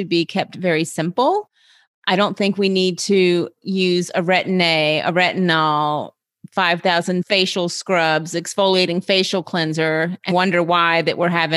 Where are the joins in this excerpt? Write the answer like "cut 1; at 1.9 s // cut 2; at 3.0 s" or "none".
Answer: cut 1; at 10.3 s

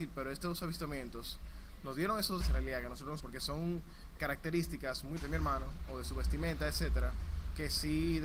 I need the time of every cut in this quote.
cut 1; at 2.4 s // cut 2; at 3.2 s // cut 3; at 4.2 s // cut 4; at 5.2 s

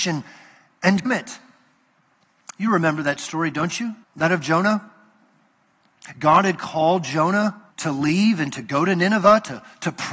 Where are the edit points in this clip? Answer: cut 1; at 1.0 s // cut 2; at 4.0 s // cut 3; at 7.7 s

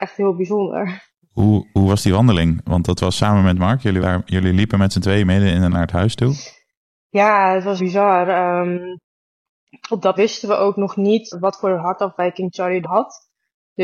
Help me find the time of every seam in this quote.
cut 1; at 4.0 s // cut 2; at 5.7 s // cut 3; at 7.8 s // cut 4; at 10.2 s // cut 5; at 11.3 s // cut 6; at 12.8 s

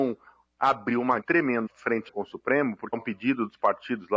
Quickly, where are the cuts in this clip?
cut 1; at 1.2 s // cut 2; at 1.7 s // cut 3; at 2.1 s // cut 4; at 2.9 s

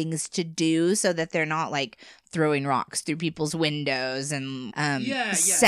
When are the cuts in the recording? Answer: cut 1; at 4.7 s

